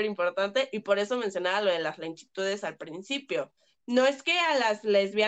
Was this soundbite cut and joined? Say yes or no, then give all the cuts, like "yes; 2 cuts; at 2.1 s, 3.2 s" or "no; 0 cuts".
no; 0 cuts